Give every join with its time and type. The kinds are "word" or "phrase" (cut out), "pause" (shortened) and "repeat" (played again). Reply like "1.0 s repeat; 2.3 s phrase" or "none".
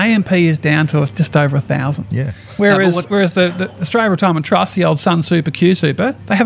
none